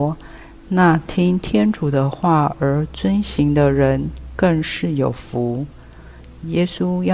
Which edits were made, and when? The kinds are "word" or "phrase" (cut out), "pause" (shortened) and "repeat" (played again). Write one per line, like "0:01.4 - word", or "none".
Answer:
none